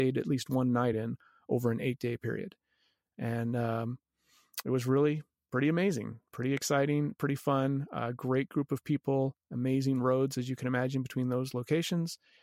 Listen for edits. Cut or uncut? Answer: uncut